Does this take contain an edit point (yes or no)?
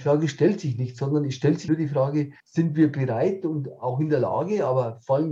yes